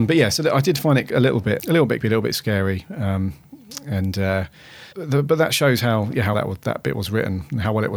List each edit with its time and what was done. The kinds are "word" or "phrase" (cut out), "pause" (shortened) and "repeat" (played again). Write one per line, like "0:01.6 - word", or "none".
0:01.6 - word
0:02.0 - word
0:04.9 - pause
0:06.3 - word